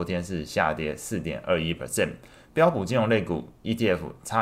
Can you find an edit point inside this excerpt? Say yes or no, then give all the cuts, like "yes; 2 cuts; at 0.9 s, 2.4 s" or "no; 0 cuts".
no; 0 cuts